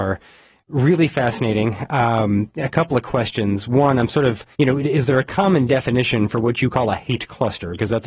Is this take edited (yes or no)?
yes